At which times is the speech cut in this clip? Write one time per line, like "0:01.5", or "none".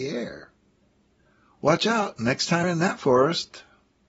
0:02.6